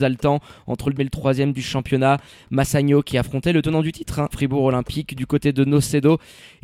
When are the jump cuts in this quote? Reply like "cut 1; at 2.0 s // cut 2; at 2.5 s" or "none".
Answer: cut 1; at 1.0 s // cut 2; at 4.3 s